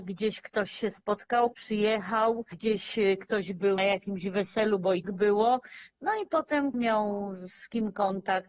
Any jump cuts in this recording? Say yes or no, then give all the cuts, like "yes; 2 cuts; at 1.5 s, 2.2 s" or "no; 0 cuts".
yes; 4 cuts; at 1.5 s, 3.8 s, 5.0 s, 6.7 s